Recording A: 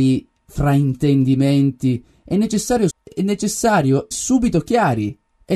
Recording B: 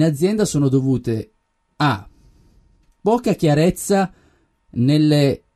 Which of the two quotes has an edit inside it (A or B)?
A